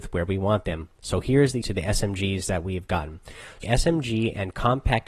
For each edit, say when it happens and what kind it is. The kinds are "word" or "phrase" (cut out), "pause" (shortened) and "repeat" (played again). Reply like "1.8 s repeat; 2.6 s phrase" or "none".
1.6 s word; 3.6 s word